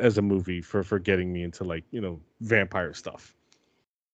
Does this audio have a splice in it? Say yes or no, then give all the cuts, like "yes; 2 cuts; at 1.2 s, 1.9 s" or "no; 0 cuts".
no; 0 cuts